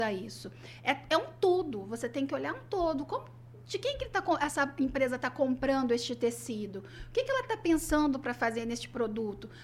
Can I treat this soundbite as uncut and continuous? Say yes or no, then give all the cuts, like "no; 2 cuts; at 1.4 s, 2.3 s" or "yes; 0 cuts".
yes; 0 cuts